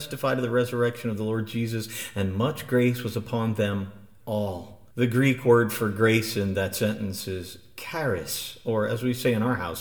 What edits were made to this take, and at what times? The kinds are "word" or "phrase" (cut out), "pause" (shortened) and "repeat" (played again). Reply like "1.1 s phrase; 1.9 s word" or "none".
4.9 s pause